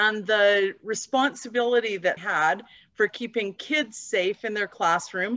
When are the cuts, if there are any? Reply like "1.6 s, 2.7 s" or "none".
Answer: 2.2 s